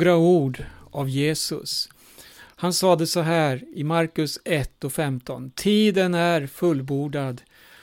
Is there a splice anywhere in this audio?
no; 0 cuts

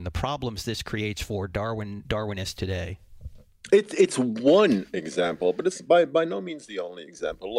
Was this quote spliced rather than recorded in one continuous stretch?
no; 0 cuts

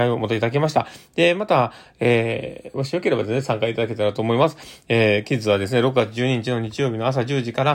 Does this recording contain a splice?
no; 0 cuts

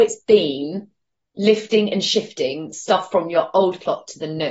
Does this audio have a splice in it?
no; 0 cuts

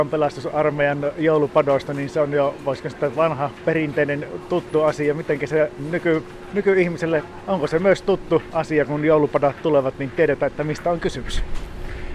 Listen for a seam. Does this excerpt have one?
no; 0 cuts

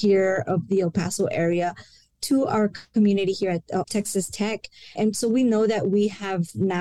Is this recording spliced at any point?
yes; 1 cut; at 4.9 s

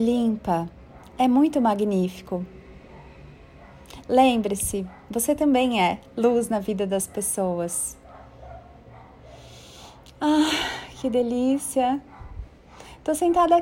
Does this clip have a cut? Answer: no; 0 cuts

